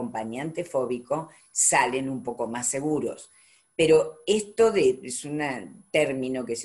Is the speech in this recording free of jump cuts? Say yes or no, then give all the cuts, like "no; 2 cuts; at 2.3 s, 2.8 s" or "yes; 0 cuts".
yes; 0 cuts